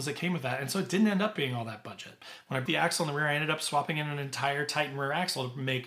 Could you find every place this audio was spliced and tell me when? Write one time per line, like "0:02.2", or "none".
0:02.7